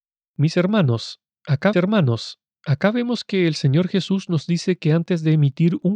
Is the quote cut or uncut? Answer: cut